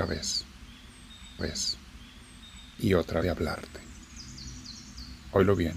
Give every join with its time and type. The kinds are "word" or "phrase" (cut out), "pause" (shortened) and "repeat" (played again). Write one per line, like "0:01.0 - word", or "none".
0:01.4 - repeat
0:03.2 - phrase